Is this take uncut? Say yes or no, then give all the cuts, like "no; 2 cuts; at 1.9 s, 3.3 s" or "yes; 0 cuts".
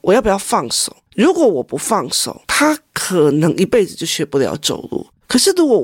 no; 1 cut; at 2.4 s